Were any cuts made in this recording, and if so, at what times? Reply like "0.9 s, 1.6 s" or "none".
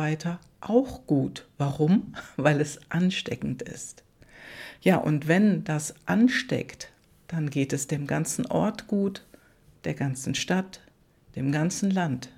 none